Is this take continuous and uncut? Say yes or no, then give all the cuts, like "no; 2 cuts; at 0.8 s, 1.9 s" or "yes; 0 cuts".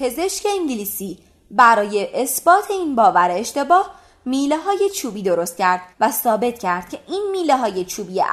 no; 1 cut; at 5.9 s